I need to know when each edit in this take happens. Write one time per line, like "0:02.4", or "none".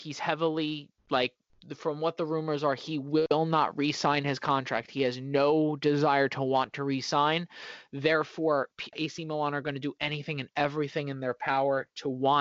0:01.0
0:08.9